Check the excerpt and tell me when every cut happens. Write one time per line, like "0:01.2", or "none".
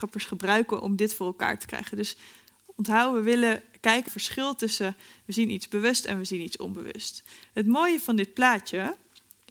0:04.1